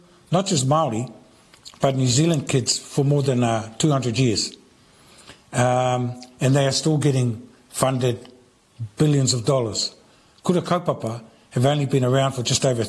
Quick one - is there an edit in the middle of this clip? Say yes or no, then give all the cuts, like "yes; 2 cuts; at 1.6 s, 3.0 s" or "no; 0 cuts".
no; 0 cuts